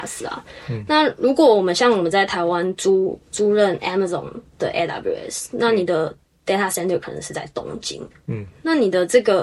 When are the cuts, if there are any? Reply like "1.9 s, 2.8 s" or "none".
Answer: none